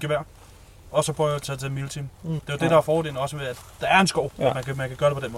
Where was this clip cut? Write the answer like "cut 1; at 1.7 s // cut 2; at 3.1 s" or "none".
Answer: cut 1; at 1.4 s // cut 2; at 2.4 s // cut 3; at 4.3 s